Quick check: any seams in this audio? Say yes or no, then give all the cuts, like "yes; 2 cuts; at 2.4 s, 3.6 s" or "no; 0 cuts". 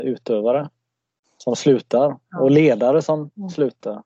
no; 0 cuts